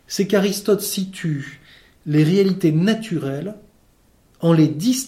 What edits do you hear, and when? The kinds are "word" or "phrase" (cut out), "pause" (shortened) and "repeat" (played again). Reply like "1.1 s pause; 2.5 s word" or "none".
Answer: none